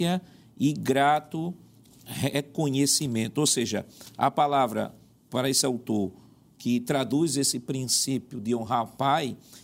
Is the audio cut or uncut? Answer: uncut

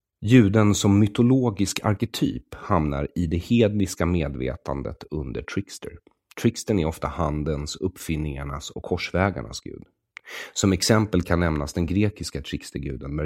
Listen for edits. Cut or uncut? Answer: uncut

